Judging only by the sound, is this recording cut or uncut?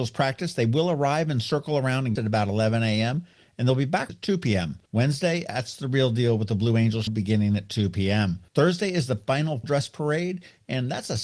cut